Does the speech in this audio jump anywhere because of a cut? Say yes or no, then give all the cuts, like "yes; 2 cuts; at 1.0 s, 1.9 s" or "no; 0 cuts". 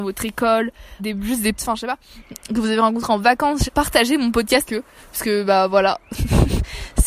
yes; 4 cuts; at 1.0 s, 1.6 s, 3.7 s, 4.7 s